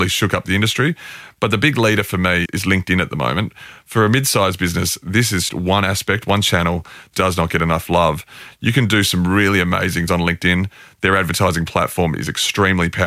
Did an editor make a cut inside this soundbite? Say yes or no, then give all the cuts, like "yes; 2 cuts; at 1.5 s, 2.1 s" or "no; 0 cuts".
yes; 4 cuts; at 2.5 s, 5.5 s, 7.1 s, 10.1 s